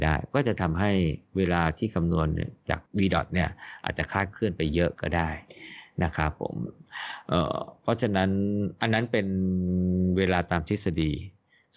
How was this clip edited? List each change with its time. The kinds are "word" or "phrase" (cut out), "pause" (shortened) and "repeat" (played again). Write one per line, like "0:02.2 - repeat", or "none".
0:02.9 - pause